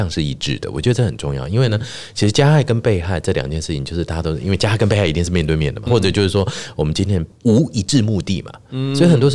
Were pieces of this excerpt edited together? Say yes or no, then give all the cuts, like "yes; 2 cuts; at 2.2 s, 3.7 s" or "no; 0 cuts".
yes; 1 cut; at 5.9 s